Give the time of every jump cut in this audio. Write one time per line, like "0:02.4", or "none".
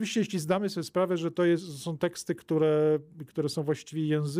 none